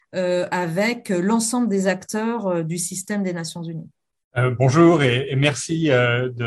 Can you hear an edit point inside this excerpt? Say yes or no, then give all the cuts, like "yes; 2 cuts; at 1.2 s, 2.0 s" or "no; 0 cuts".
no; 0 cuts